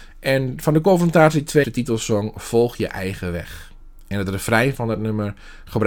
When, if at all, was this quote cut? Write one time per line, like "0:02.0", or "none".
0:01.6